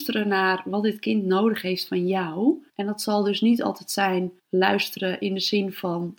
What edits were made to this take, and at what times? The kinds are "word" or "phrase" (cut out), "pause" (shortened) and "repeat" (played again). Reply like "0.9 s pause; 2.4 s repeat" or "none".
2.7 s pause; 4.4 s pause